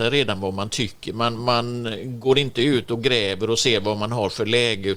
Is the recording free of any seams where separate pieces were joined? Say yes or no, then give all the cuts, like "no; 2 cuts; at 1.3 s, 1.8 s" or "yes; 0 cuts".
yes; 0 cuts